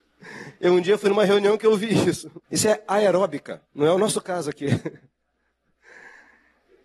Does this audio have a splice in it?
yes; 2 cuts; at 2.4 s, 3.6 s

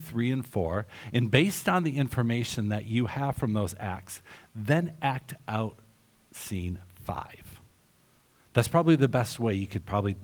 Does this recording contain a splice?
no; 0 cuts

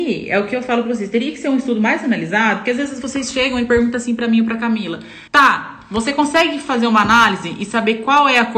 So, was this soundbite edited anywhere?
yes; 1 cut; at 5.3 s

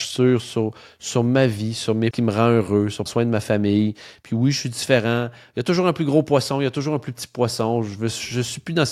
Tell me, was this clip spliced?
yes; 2 cuts; at 2.1 s, 3.1 s

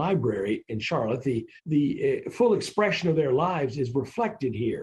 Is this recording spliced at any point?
yes; 1 cut; at 1.6 s

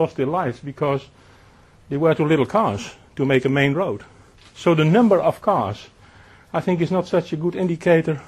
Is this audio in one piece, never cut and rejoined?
yes; 0 cuts

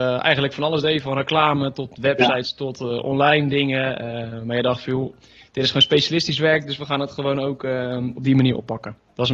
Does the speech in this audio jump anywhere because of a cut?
no; 0 cuts

